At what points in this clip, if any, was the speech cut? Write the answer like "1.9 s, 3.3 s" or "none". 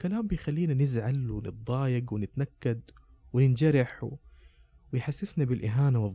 none